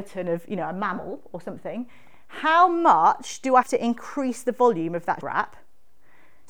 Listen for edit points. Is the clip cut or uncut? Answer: cut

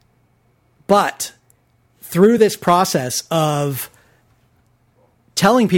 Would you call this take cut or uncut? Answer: uncut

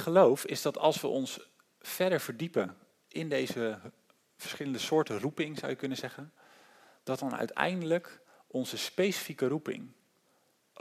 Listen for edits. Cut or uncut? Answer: uncut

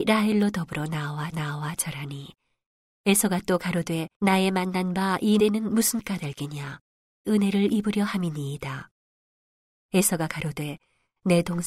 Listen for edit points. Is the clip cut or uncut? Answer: cut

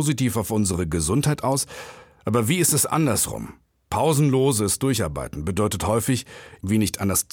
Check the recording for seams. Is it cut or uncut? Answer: uncut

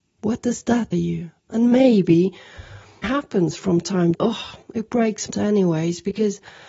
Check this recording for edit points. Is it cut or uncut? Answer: cut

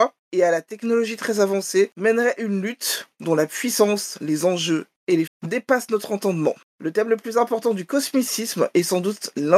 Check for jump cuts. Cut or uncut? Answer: cut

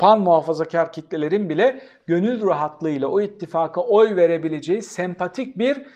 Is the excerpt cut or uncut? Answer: uncut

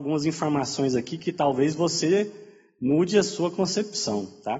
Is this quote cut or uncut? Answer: uncut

